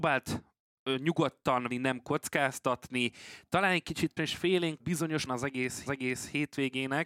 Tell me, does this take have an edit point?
yes; 5 cuts; at 1.7 s, 4.2 s, 4.8 s, 5.3 s, 5.9 s

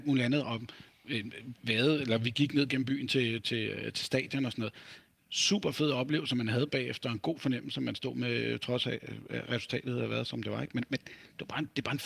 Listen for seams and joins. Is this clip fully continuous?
yes; 0 cuts

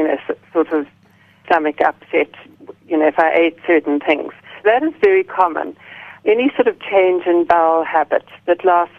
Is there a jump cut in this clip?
yes; 2 cuts; at 1.4 s, 4.6 s

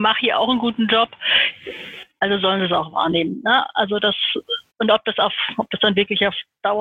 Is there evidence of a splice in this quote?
yes; 1 cut; at 4.7 s

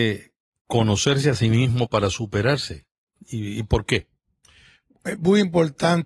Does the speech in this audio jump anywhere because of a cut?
no; 0 cuts

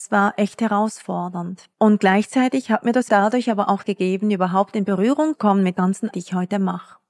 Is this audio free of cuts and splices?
no; 6 cuts; at 1.7 s, 3.1 s, 3.8 s, 5.3 s, 5.7 s, 6.1 s

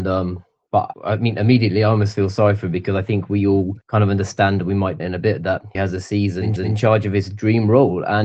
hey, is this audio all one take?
no; 5 cuts; at 0.9 s, 3.8 s, 5.0 s, 5.7 s, 6.6 s

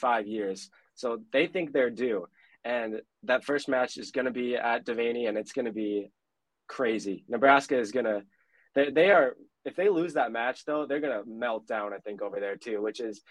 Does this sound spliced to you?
yes; 1 cut; at 8.9 s

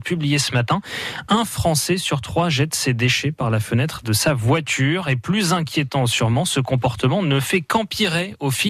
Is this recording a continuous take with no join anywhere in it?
yes; 0 cuts

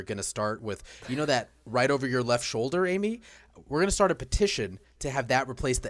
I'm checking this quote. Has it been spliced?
no; 0 cuts

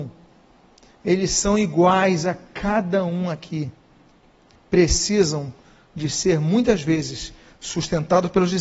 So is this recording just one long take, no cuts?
yes; 0 cuts

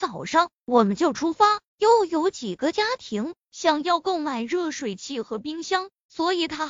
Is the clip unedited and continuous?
no; 1 cut; at 1.7 s

